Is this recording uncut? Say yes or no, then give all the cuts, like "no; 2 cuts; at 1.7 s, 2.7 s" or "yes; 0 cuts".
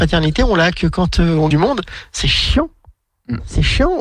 no; 1 cut; at 1.5 s